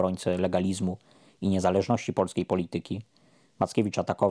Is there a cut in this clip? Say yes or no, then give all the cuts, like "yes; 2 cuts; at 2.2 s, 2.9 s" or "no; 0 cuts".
no; 0 cuts